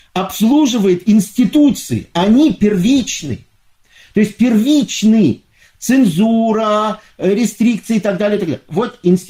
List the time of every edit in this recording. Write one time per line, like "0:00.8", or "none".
none

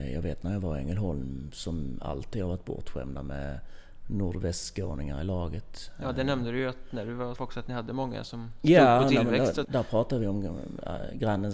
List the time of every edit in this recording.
0:07.4
0:09.6

